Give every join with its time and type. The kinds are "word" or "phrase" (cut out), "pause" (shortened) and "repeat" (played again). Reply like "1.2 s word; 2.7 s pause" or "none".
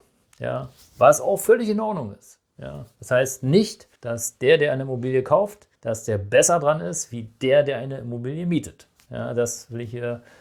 4.0 s pause; 5.8 s pause